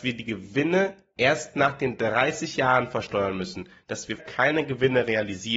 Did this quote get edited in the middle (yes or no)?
yes